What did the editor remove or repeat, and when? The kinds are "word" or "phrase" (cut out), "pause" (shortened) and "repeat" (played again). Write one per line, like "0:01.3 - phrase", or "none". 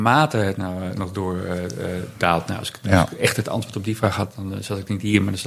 none